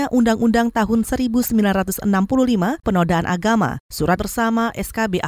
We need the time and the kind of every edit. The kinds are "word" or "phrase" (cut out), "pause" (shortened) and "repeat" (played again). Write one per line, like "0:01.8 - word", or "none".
0:02.8 - word
0:04.2 - word